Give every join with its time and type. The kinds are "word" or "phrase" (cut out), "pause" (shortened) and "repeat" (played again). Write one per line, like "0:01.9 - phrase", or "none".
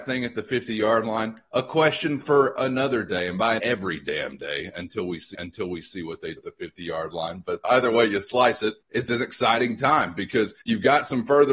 0:03.6 - phrase
0:05.3 - repeat
0:06.4 - word
0:07.6 - word
0:08.8 - pause
0:10.6 - pause